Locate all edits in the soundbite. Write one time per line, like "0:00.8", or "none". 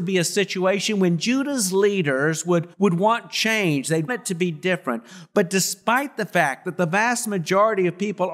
0:02.7
0:04.1